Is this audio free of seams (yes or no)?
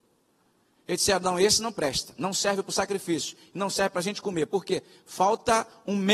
yes